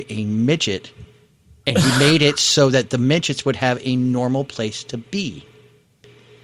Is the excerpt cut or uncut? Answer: uncut